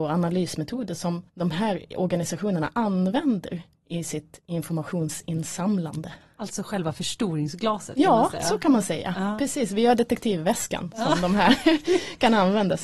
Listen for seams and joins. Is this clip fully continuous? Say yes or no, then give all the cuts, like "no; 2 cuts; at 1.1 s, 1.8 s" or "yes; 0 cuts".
no; 1 cut; at 1.3 s